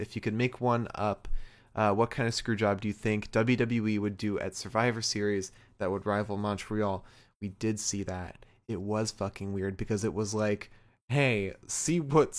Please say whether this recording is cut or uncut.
uncut